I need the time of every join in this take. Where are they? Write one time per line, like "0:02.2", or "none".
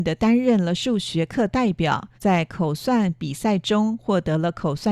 0:02.1